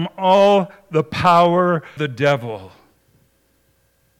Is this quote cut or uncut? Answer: cut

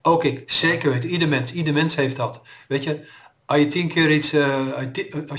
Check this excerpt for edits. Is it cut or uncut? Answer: uncut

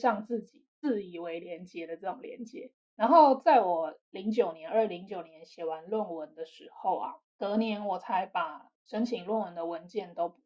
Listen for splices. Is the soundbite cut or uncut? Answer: cut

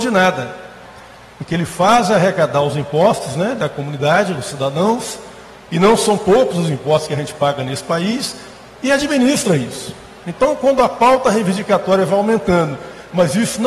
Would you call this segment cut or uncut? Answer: uncut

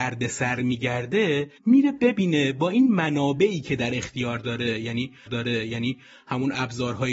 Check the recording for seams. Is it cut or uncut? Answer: cut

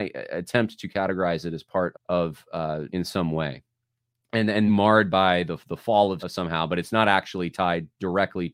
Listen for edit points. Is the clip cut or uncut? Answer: cut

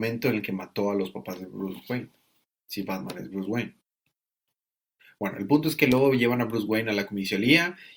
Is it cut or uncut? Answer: uncut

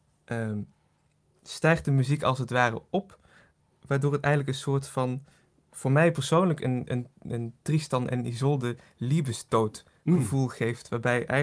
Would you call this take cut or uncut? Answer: uncut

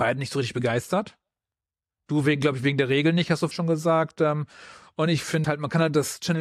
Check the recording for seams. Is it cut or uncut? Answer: cut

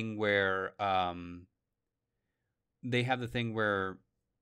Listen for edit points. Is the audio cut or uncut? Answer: uncut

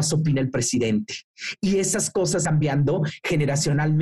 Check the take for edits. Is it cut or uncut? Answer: cut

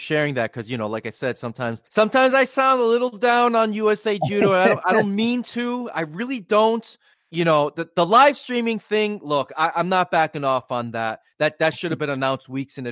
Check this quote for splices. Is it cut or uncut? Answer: cut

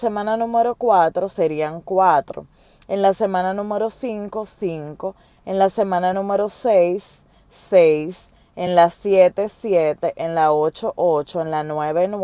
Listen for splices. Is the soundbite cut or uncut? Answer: uncut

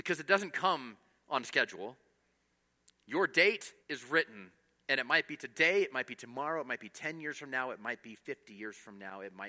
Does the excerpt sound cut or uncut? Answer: cut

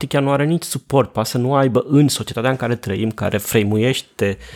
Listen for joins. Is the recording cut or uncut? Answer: uncut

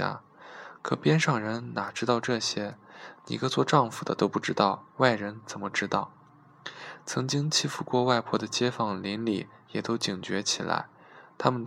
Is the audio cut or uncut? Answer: cut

